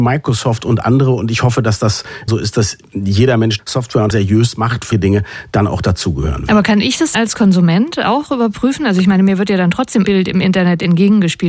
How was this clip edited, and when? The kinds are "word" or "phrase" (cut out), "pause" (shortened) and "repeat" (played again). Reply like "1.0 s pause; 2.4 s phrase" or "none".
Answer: 2.3 s word; 3.6 s word; 4.1 s word; 4.9 s word; 7.1 s word; 10.1 s word